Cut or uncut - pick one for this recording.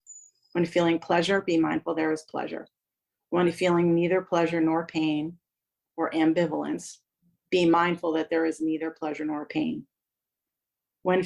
uncut